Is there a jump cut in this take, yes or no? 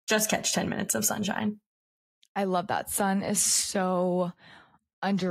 no